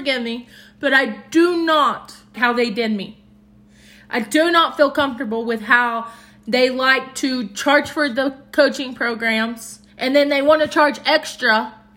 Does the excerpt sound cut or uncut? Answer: cut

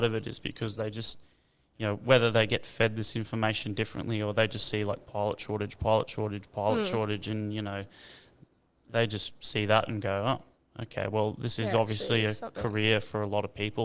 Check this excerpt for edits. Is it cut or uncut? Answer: uncut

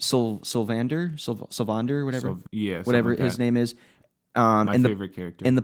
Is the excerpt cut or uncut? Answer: cut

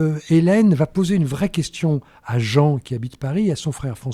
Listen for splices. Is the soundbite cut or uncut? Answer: uncut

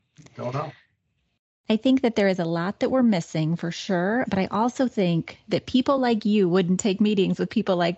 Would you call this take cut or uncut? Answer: uncut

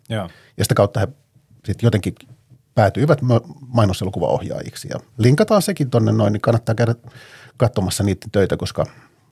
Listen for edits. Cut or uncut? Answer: uncut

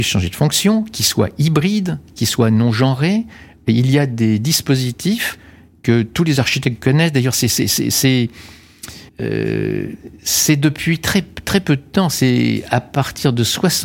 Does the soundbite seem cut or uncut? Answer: cut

